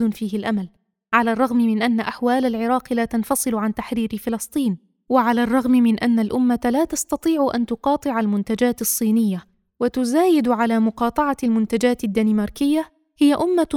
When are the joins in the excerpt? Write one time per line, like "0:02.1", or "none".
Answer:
none